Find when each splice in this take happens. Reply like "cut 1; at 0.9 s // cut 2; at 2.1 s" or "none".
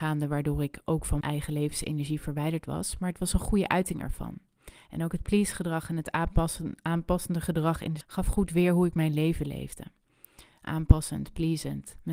cut 1; at 1.2 s // cut 2; at 8.0 s